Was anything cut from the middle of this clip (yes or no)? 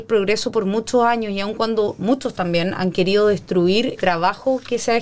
yes